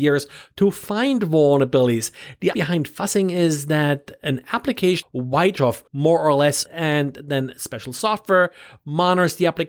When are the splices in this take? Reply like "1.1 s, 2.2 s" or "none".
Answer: 2.5 s, 5.0 s, 5.6 s, 5.9 s, 6.7 s

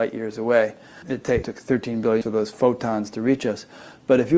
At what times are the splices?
1.0 s, 1.4 s, 2.2 s

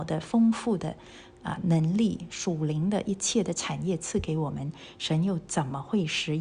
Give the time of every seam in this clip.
none

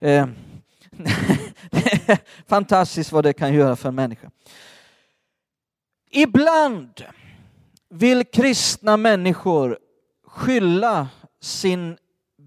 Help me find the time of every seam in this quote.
none

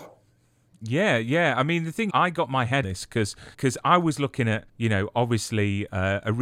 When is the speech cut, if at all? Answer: 2.1 s, 2.8 s, 3.5 s, 4.7 s

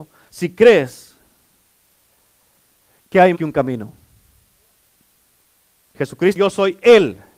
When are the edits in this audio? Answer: 3.3 s, 6.4 s

